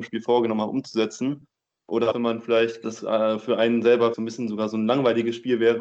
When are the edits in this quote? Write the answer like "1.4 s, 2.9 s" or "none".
2.1 s, 2.8 s, 4.1 s